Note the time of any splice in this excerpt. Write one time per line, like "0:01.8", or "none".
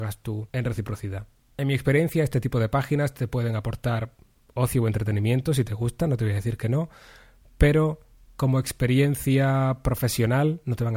none